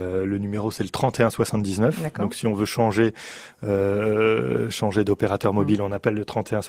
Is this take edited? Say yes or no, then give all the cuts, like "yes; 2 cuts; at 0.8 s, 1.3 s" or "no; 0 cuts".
no; 0 cuts